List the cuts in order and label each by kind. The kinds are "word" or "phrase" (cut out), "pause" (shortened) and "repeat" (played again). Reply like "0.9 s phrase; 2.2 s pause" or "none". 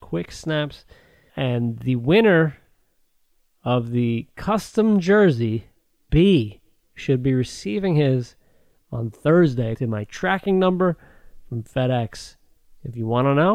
1.3 s word; 6.1 s word; 9.7 s word